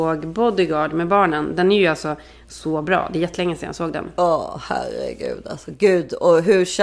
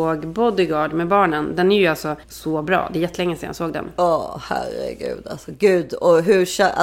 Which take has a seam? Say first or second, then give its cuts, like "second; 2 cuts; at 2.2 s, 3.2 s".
second; 1 cut; at 2.2 s